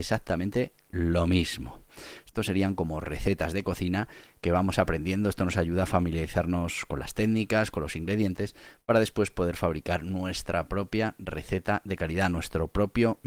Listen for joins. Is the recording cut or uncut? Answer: uncut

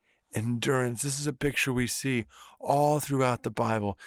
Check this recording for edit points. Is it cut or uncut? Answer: uncut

